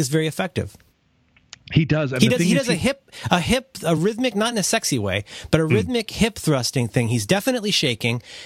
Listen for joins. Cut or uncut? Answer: uncut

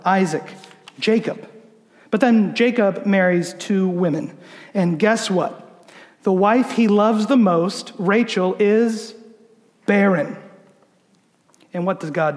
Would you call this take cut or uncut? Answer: uncut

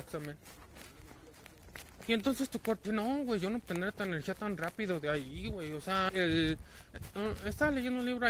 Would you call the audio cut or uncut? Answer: cut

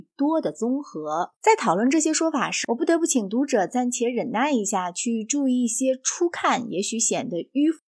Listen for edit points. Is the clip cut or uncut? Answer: cut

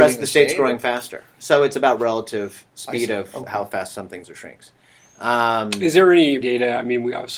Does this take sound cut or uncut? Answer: cut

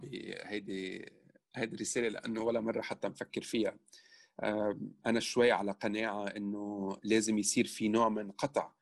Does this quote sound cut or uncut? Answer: uncut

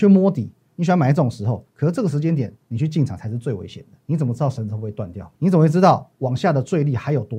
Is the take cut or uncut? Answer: cut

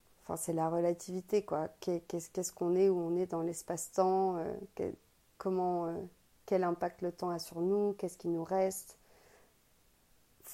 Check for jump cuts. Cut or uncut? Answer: uncut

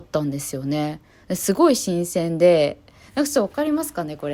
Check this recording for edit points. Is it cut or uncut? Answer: uncut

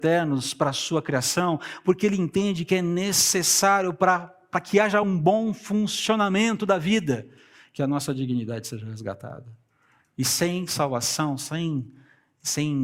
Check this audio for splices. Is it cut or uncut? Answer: uncut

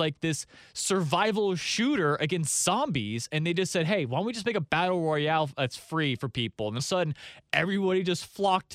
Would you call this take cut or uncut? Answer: cut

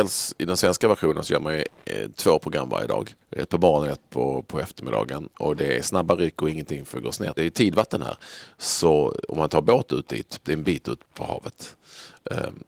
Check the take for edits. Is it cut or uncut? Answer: cut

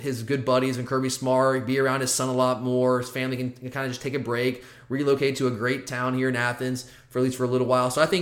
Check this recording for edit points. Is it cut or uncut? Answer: uncut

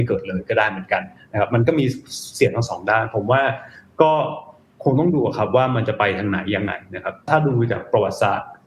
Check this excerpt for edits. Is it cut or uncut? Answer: uncut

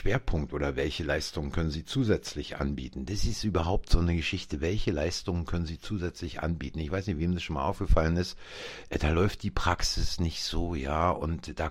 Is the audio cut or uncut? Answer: uncut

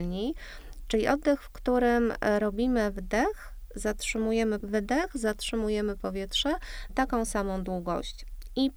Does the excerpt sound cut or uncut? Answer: cut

